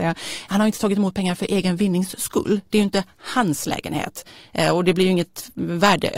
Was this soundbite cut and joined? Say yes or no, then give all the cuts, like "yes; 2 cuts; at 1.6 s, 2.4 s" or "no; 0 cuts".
no; 0 cuts